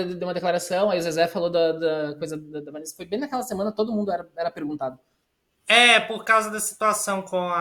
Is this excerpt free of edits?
yes; 0 cuts

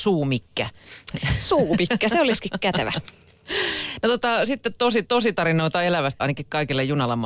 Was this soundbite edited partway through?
yes; 2 cuts; at 5.0 s, 6.2 s

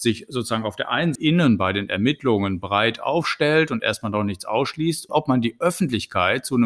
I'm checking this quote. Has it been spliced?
yes; 2 cuts; at 1.2 s, 5.1 s

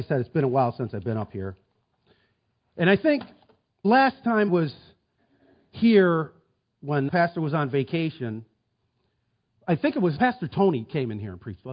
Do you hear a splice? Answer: yes; 4 cuts; at 3.8 s, 4.5 s, 7.1 s, 10.2 s

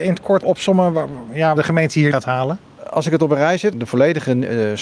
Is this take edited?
yes; 2 cuts; at 1.6 s, 2.1 s

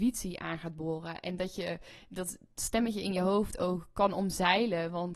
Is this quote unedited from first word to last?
yes; 0 cuts

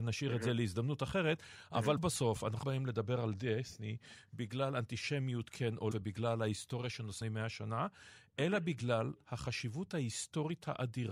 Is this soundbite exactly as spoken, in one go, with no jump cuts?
no; 4 cuts; at 2.0 s, 2.6 s, 5.9 s, 7.2 s

